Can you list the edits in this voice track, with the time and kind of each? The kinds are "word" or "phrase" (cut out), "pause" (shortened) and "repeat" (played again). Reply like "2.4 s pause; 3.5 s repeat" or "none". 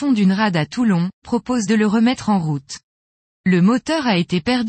1.2 s word; 1.7 s word